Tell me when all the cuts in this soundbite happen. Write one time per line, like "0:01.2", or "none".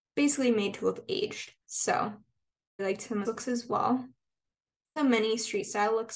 0:01.6
0:02.8
0:03.2
0:05.0